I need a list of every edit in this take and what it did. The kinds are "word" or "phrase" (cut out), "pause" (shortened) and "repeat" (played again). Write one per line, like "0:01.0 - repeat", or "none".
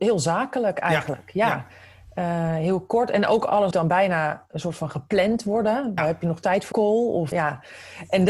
0:03.7 - word
0:06.0 - word
0:06.7 - word
0:07.3 - word

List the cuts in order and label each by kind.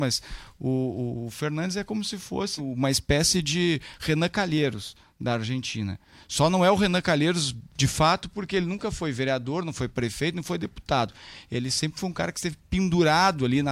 0:02.6 - word

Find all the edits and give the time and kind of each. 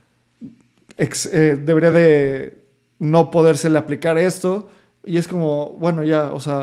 none

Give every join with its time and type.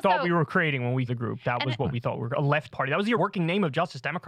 0:01.1 - word
0:02.7 - word
0:03.2 - word

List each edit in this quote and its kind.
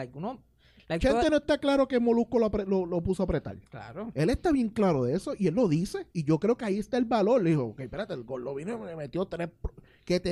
0:06.1 - pause

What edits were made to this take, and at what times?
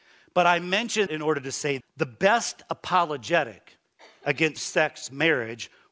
0:01.1 - word
0:01.8 - word
0:04.6 - word

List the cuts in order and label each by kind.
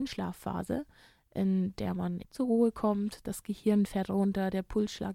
0:02.2 - word

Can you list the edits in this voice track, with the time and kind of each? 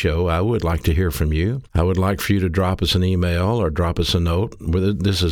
0:01.7 - pause

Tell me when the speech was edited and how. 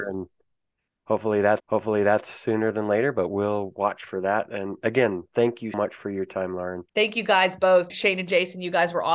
0:01.6 - repeat
0:05.7 - word
0:06.9 - pause
0:07.9 - word

